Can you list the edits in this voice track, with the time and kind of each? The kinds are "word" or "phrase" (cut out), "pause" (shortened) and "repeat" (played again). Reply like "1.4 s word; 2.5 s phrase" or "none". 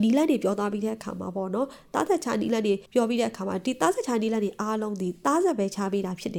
2.9 s pause